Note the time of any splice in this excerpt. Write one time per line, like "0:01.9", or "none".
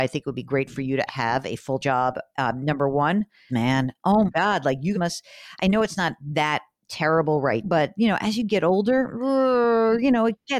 0:01.1
0:01.8
0:03.5
0:04.3
0:04.9
0:07.6